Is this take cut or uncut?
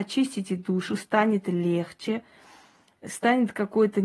uncut